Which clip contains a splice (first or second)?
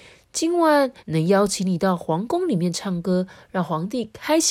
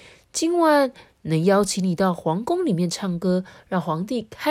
first